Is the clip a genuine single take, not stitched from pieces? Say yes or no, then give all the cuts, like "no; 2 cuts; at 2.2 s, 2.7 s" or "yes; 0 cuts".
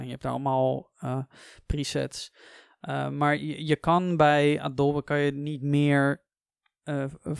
yes; 0 cuts